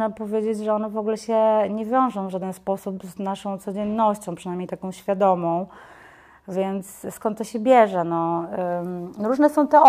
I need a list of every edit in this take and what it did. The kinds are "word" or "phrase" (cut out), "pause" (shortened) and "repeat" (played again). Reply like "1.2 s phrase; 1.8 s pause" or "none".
none